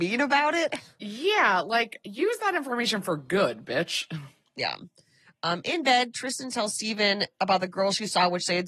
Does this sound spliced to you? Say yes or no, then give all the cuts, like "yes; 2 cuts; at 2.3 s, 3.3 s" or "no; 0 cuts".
no; 0 cuts